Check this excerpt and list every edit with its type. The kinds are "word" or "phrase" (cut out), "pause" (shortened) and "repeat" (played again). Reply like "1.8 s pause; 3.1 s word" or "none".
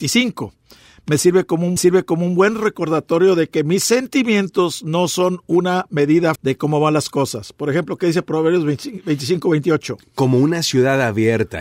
1.8 s repeat; 6.4 s word